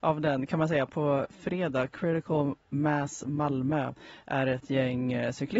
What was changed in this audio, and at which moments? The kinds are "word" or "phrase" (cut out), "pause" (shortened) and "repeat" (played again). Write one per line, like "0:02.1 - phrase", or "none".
0:04.2 - word